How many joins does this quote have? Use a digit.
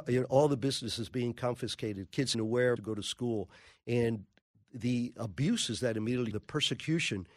4